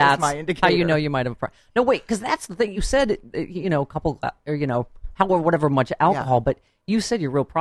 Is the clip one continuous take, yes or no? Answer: yes